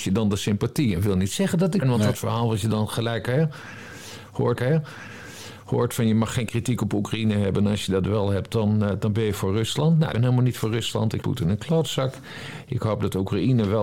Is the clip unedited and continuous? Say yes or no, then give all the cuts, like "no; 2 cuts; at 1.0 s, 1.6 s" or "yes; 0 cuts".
no; 5 cuts; at 1.8 s, 2.1 s, 4.6 s, 10.1 s, 11.2 s